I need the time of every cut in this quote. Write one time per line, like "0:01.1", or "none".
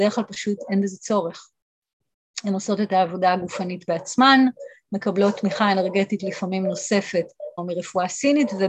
0:07.6